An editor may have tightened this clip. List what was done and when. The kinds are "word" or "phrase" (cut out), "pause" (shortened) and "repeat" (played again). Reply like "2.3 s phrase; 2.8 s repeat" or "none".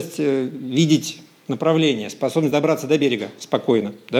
none

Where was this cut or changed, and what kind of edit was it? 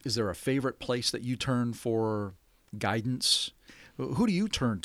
none

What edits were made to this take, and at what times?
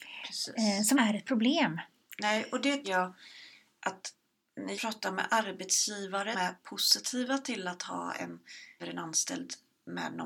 0.9 s word; 2.8 s word; 4.8 s word; 6.3 s word; 8.8 s phrase

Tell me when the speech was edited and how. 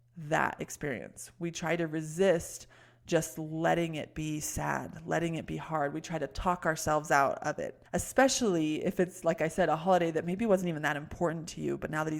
7.9 s pause

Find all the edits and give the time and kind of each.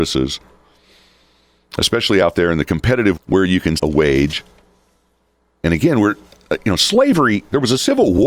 3.1 s word; 3.8 s word

